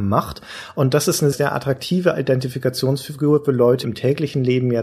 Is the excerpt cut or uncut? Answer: cut